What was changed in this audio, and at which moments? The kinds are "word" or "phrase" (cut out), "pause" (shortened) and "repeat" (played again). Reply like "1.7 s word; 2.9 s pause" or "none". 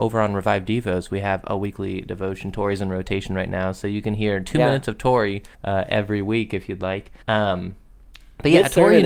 5.5 s pause; 7.2 s pause